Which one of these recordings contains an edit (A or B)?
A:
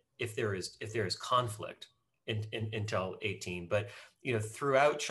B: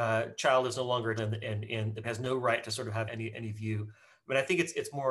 B